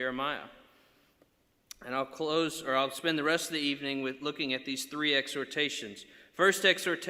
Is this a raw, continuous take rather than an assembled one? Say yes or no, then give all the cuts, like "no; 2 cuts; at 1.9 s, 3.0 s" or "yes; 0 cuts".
yes; 0 cuts